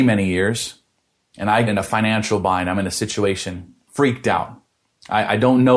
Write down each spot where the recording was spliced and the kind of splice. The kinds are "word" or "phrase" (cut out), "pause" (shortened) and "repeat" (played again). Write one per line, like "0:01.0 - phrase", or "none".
0:01.7 - word
0:03.9 - word